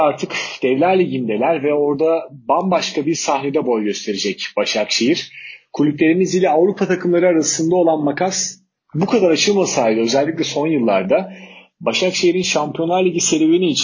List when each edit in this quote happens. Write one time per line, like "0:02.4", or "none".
none